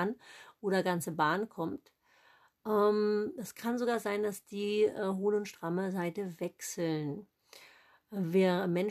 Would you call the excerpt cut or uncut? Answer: uncut